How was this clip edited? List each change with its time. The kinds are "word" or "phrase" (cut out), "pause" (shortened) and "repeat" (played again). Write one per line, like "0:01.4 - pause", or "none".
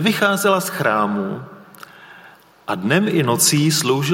none